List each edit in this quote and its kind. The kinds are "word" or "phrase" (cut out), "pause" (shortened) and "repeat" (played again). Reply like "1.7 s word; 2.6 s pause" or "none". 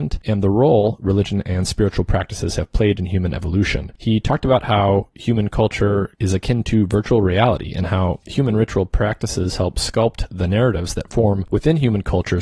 none